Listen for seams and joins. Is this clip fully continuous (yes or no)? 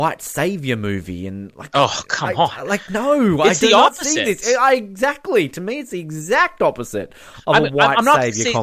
yes